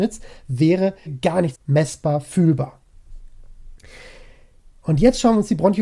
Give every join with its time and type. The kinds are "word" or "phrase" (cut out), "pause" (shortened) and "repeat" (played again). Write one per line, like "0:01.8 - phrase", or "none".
0:01.1 - word
0:01.5 - word